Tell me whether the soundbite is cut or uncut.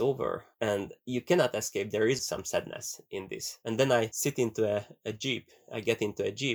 cut